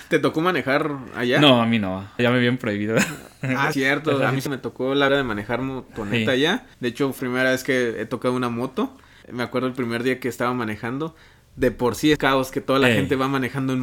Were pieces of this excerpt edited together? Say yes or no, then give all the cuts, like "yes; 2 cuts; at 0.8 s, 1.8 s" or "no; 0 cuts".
yes; 8 cuts; at 2.2 s, 3.7 s, 4.5 s, 5.1 s, 6.7 s, 7.2 s, 9.2 s, 12.2 s